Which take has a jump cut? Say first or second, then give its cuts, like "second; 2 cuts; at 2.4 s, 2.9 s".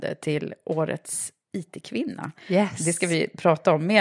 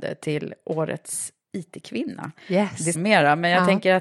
second; 1 cut; at 2.9 s